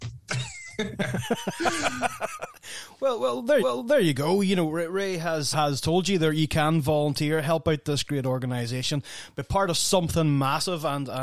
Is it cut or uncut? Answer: cut